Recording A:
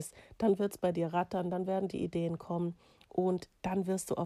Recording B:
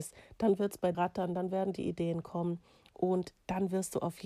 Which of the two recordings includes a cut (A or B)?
B